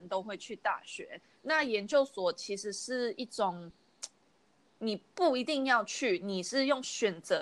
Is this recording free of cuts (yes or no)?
yes